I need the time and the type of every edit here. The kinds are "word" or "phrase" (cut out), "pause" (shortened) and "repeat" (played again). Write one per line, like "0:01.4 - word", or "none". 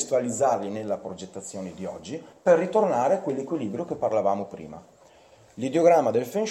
none